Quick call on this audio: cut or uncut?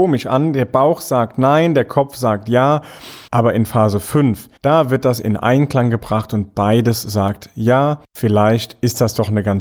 cut